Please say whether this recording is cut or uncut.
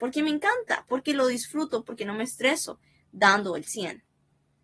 uncut